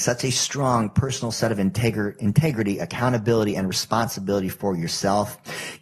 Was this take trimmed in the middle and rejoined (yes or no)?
no